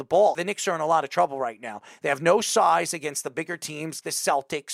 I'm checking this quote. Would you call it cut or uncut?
uncut